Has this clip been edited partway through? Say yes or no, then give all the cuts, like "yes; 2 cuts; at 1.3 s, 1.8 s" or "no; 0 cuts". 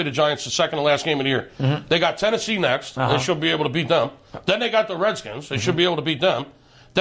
no; 0 cuts